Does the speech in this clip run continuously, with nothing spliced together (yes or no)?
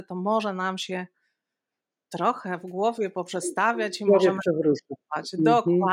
yes